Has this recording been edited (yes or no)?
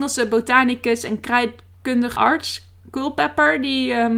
yes